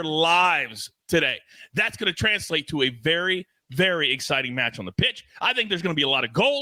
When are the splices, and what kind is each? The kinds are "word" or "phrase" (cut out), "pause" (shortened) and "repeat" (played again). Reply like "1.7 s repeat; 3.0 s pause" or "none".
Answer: none